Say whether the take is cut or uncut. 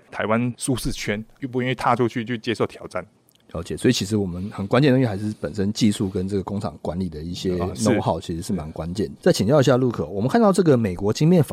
uncut